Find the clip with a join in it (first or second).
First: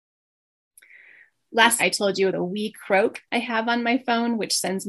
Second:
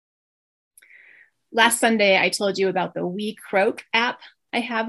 first